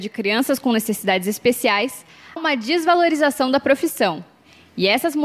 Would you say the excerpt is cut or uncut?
cut